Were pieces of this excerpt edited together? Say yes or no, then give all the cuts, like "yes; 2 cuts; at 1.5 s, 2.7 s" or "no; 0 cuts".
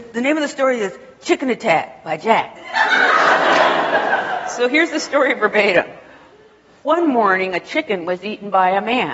no; 0 cuts